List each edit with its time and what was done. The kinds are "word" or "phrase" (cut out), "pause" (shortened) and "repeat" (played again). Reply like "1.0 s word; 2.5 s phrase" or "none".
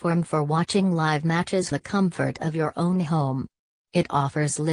1.7 s word